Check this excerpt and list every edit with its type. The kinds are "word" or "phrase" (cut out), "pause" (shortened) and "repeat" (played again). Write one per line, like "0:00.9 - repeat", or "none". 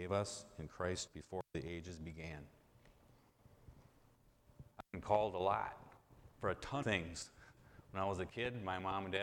0:01.1 - word
0:04.7 - pause
0:06.3 - pause
0:06.8 - word